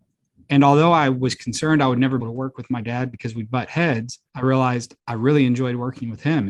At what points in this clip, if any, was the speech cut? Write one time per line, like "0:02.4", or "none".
0:02.2
0:04.3
0:05.0